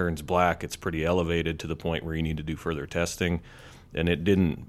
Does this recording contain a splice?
no; 0 cuts

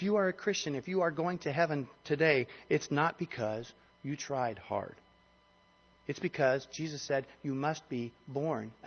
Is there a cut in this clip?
no; 0 cuts

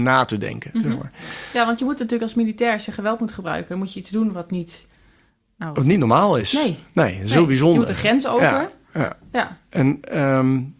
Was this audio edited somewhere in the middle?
no; 0 cuts

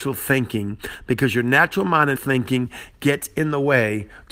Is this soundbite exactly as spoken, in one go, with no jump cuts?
no; 1 cut; at 2.2 s

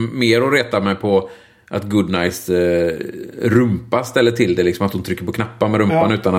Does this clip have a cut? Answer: no; 0 cuts

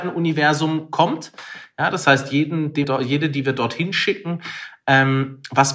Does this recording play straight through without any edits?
no; 1 cut; at 2.8 s

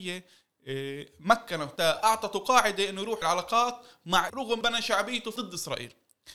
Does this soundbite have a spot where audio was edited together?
yes; 5 cuts; at 1.8 s, 3.2 s, 4.3 s, 4.6 s, 5.4 s

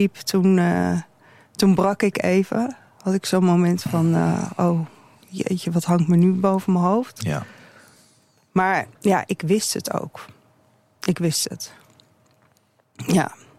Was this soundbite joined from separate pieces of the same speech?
yes; 1 cut; at 8.9 s

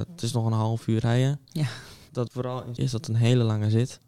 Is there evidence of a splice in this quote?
yes; 2 cuts; at 2.3 s, 2.8 s

